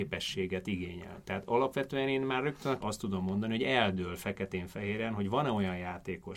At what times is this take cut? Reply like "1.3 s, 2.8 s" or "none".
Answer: 2.8 s

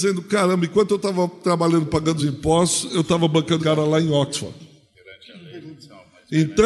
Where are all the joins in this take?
2.2 s, 3.6 s

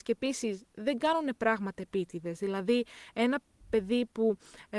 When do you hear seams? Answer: none

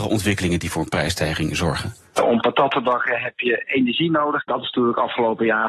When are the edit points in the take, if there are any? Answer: none

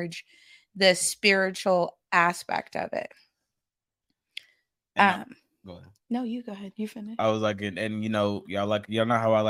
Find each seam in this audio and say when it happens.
none

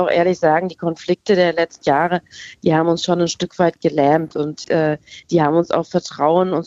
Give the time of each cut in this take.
1.8 s

